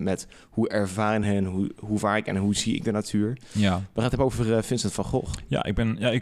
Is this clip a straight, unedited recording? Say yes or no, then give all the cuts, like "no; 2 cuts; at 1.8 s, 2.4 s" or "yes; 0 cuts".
yes; 0 cuts